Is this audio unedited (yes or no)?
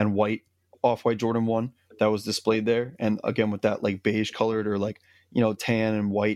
yes